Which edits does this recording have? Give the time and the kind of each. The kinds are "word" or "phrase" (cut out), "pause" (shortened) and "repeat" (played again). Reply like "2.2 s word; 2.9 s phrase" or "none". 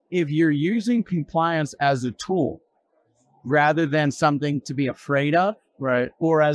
none